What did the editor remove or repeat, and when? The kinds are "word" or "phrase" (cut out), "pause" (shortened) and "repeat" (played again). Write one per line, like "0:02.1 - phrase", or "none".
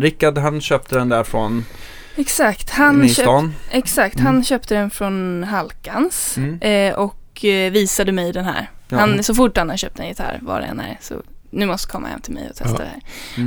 none